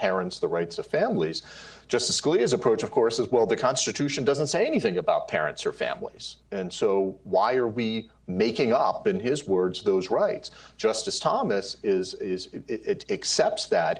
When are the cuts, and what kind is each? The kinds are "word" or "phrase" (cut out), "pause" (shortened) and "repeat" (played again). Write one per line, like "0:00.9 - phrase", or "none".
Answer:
0:06.4 - pause